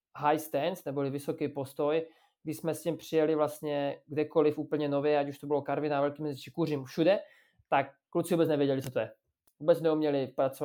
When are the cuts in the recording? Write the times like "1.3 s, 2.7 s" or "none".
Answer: none